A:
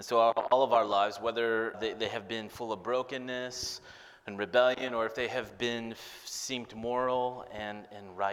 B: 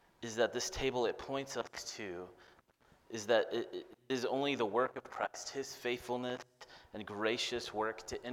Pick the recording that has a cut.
A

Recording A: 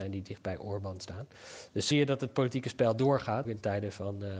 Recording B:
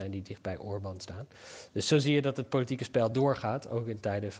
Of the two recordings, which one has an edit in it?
A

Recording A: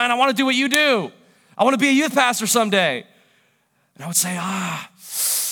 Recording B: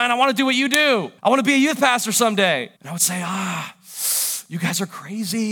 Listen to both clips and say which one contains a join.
B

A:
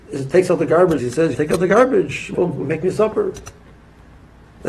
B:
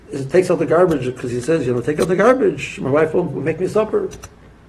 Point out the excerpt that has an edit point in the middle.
A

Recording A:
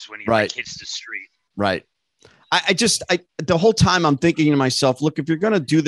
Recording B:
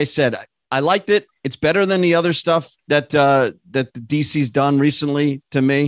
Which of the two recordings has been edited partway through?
B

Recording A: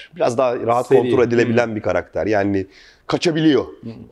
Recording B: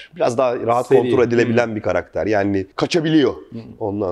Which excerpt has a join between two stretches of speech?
B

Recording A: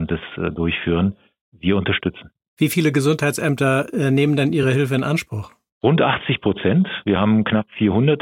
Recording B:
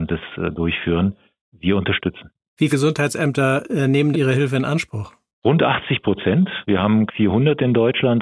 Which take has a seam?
B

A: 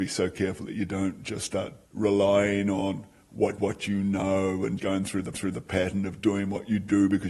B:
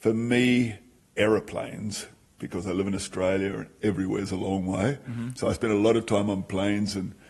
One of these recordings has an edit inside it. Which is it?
A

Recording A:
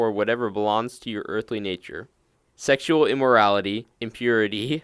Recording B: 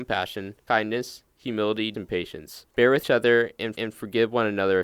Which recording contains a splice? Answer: B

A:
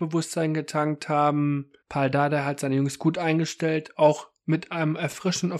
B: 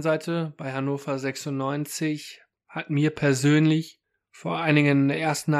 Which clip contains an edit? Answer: A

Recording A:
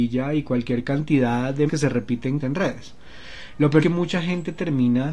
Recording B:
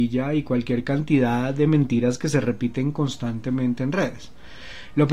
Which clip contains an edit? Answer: A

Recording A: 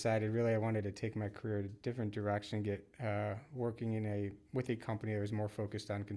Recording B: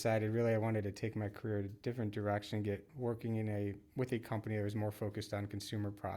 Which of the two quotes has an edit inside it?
B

